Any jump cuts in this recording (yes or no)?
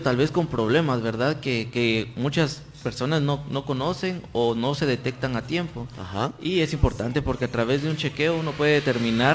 no